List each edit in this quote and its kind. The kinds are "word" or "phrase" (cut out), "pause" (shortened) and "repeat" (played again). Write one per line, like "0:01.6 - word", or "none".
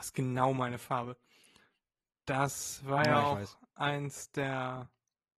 none